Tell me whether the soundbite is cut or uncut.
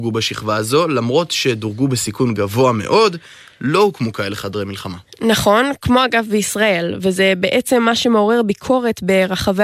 uncut